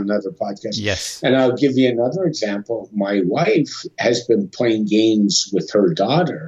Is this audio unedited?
yes; 0 cuts

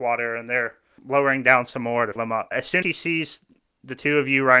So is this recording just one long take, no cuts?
no; 4 cuts; at 1.0 s, 2.2 s, 2.5 s, 2.8 s

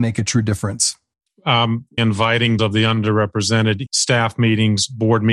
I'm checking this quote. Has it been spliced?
yes; 3 cuts; at 2.0 s, 2.6 s, 3.9 s

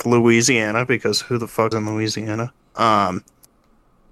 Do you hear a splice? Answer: yes; 2 cuts; at 1.7 s, 2.6 s

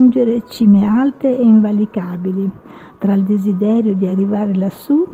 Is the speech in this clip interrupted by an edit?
no; 0 cuts

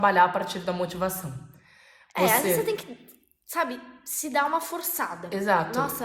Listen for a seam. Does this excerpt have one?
no; 0 cuts

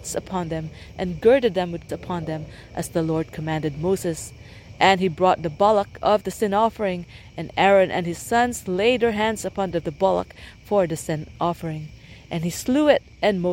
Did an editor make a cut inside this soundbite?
yes; 2 cuts; at 1.9 s, 9.7 s

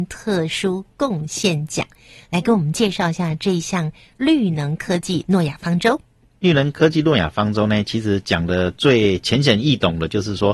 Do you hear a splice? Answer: no; 0 cuts

